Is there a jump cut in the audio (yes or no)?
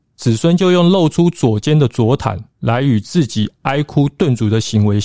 yes